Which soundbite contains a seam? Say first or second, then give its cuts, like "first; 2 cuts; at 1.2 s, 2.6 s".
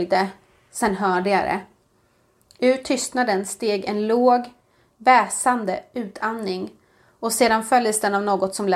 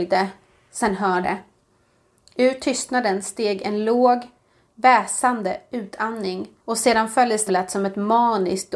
second; 3 cuts; at 1.2 s, 6.6 s, 7.5 s